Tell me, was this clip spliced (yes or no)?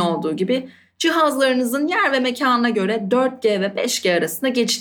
no